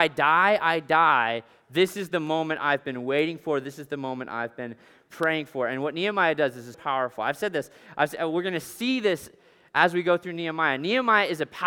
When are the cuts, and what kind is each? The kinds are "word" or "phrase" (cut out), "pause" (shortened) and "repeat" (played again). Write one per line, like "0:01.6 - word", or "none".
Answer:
0:06.7 - word